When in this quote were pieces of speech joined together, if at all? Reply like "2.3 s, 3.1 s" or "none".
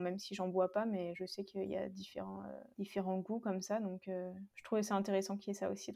4.5 s